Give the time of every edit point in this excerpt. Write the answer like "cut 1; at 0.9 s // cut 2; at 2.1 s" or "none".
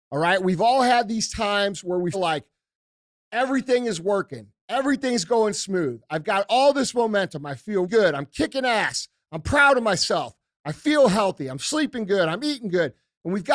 cut 1; at 2.1 s // cut 2; at 7.8 s